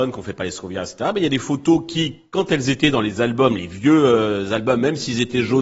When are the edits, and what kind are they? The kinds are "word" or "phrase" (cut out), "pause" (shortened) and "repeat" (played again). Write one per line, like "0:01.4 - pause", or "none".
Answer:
none